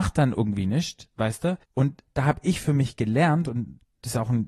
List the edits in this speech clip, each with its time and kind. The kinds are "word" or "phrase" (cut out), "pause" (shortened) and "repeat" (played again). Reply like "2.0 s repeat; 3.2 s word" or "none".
1.6 s pause